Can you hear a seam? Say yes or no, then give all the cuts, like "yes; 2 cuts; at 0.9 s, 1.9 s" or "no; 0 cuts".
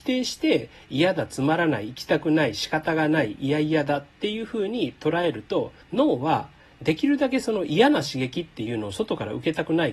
yes; 1 cut; at 5.8 s